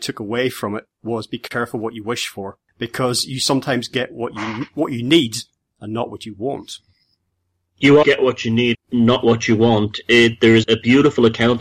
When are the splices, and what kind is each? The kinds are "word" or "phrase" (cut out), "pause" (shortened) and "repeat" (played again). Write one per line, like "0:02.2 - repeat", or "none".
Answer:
0:08.0 - word
0:08.7 - word
0:10.6 - word

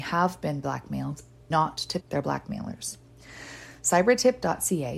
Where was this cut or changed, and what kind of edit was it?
0:01.5 - word
0:02.0 - word

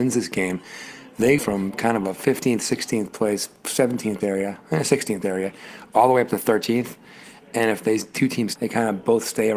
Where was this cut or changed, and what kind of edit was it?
0:01.4 - word
0:04.2 - word
0:05.2 - word
0:08.6 - word

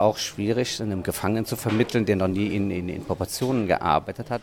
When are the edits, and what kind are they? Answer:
none

